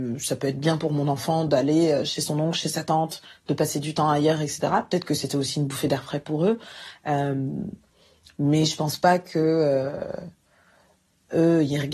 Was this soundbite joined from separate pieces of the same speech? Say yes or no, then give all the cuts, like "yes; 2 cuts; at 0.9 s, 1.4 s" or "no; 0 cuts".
no; 0 cuts